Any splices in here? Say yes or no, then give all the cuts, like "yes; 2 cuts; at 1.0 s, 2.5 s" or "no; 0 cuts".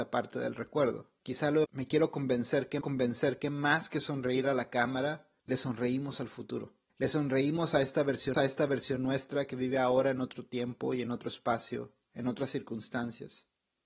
yes; 6 cuts; at 1.2 s, 1.6 s, 2.8 s, 5.4 s, 6.9 s, 8.3 s